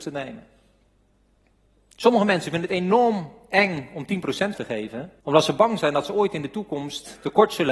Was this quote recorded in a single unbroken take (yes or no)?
no